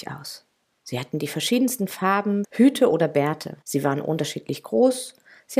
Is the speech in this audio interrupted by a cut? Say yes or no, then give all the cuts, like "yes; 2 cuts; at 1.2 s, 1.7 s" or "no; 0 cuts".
yes; 2 cuts; at 2.4 s, 3.6 s